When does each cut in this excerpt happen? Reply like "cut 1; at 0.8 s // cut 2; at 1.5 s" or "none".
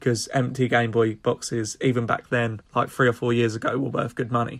cut 1; at 2.7 s